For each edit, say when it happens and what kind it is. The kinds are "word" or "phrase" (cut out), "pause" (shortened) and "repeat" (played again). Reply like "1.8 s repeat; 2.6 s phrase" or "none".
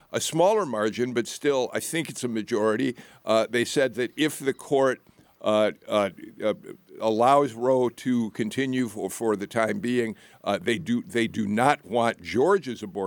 none

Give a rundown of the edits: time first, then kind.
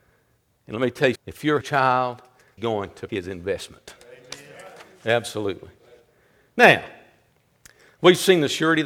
1.1 s word; 1.6 s word; 2.6 s word; 3.1 s word

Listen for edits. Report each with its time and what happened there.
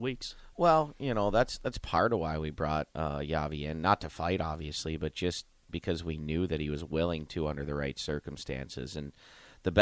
2.9 s pause

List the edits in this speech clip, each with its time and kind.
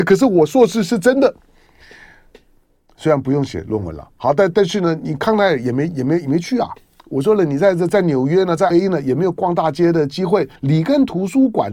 8.7 s word; 10.6 s pause

